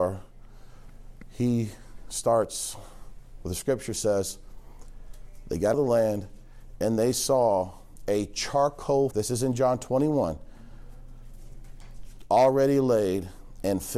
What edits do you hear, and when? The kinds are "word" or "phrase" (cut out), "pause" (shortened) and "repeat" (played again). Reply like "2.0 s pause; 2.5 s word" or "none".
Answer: 5.7 s word; 9.1 s word